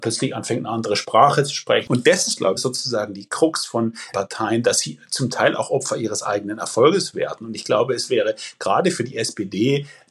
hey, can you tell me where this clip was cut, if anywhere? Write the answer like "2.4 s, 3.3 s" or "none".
2.6 s, 4.1 s